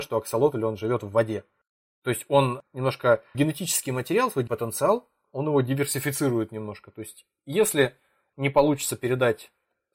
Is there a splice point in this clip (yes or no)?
yes